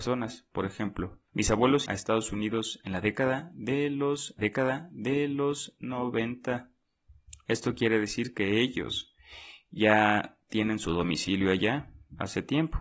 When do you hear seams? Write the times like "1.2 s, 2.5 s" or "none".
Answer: 1.3 s, 1.9 s, 4.4 s